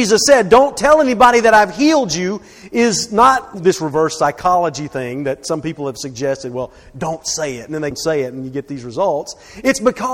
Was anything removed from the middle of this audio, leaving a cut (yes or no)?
yes